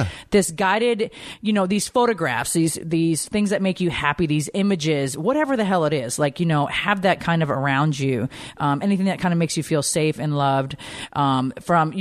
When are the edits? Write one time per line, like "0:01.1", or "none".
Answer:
none